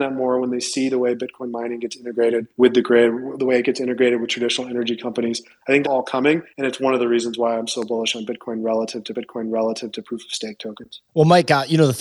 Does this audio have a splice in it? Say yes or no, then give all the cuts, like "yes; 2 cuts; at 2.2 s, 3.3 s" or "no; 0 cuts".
yes; 5 cuts; at 2.5 s, 5.8 s, 6.5 s, 9.1 s, 11.1 s